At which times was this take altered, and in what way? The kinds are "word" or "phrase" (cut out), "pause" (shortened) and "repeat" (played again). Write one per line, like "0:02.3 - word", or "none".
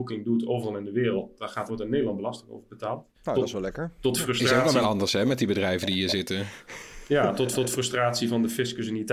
0:01.7 - word
0:03.1 - pause
0:04.8 - word
0:07.5 - repeat